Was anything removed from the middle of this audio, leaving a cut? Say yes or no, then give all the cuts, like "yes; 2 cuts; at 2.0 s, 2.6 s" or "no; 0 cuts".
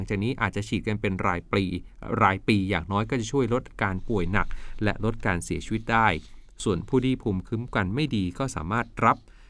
no; 0 cuts